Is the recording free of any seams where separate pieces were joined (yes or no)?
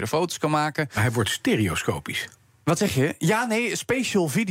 yes